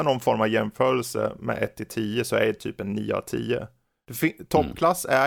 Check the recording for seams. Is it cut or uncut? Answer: uncut